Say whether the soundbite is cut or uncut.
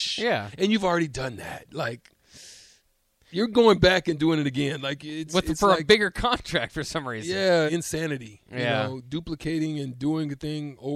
cut